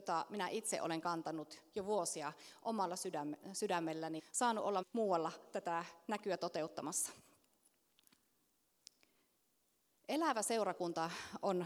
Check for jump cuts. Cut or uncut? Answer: cut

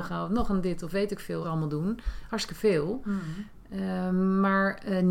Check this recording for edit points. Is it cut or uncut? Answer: cut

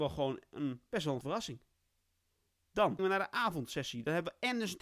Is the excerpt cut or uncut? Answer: cut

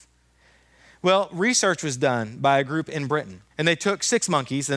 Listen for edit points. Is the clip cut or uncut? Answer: cut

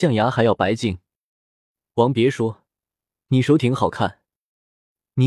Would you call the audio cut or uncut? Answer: uncut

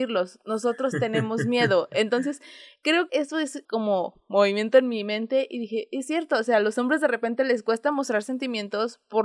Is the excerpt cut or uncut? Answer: cut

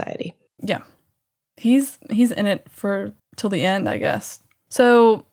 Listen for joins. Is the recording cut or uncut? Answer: cut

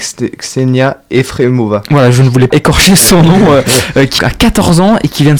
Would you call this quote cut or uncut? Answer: cut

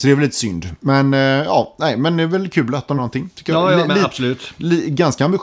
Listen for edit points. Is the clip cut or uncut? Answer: cut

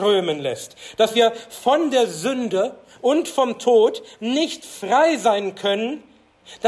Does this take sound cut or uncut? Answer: uncut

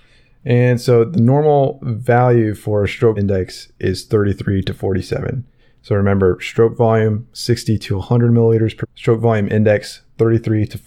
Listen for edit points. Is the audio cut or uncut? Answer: cut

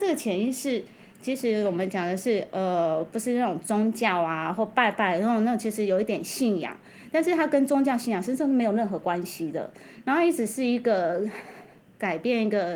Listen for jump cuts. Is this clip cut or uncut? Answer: uncut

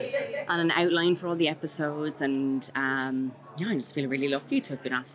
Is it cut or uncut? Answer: uncut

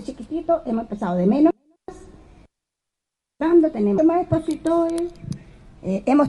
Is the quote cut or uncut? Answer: cut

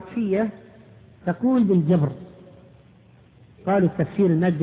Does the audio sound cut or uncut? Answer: cut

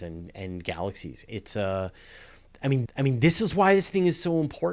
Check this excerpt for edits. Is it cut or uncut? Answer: cut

